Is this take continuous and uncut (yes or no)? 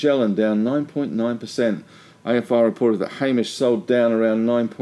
yes